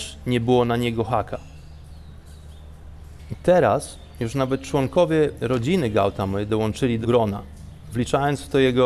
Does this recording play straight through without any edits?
no; 1 cut; at 7.0 s

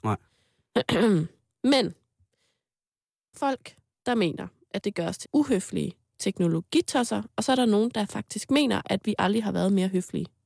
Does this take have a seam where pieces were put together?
yes; 3 cuts; at 3.3 s, 4.8 s, 5.2 s

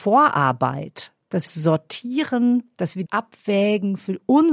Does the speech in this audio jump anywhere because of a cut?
yes; 2 cuts; at 1.5 s, 3.1 s

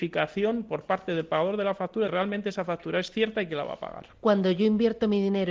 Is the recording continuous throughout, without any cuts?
no; 1 cut; at 2.1 s

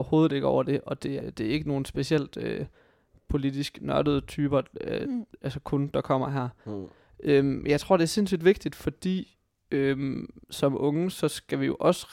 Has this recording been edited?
yes; 2 cuts; at 1.2 s, 10.4 s

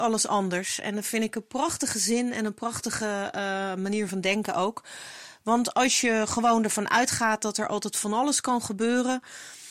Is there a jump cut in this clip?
no; 0 cuts

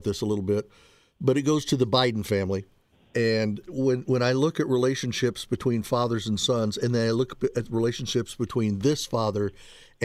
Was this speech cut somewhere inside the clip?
no; 0 cuts

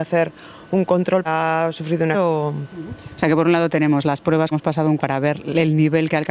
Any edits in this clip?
yes; 4 cuts; at 1.3 s, 2.1 s, 4.5 s, 5.0 s

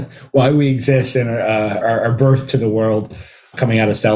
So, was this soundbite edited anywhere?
yes; 1 cut; at 1.8 s

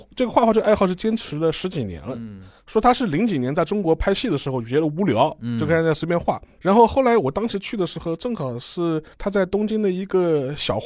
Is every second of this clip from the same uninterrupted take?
no; 1 cut; at 9.1 s

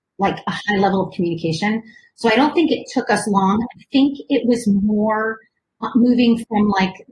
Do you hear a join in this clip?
no; 0 cuts

